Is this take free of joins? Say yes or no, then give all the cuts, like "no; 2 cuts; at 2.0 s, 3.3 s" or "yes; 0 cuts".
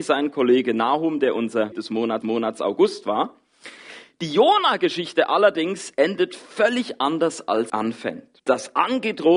no; 4 cuts; at 1.7 s, 2.2 s, 7.7 s, 8.4 s